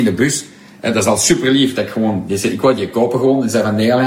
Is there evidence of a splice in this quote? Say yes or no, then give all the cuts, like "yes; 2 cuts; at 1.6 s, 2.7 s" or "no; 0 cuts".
no; 0 cuts